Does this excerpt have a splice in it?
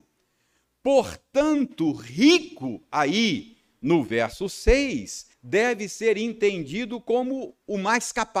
yes; 1 cut; at 5.3 s

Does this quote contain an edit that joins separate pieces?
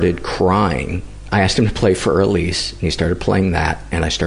no; 0 cuts

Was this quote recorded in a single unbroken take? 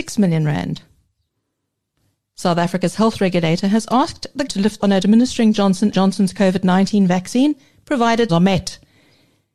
no; 4 cuts; at 4.5 s, 4.8 s, 5.9 s, 8.3 s

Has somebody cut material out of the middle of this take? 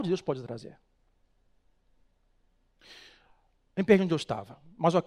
no; 0 cuts

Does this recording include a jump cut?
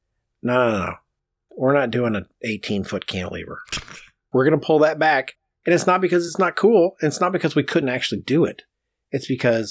no; 0 cuts

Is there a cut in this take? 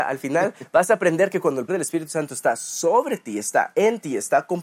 yes; 1 cut; at 1.7 s

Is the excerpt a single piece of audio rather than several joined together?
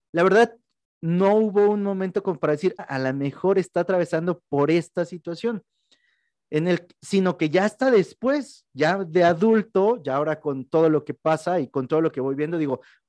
no; 1 cut; at 2.8 s

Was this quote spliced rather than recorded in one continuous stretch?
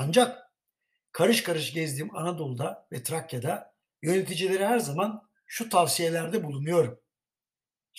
no; 0 cuts

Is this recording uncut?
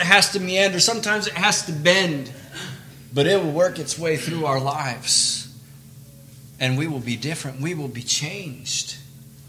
yes; 0 cuts

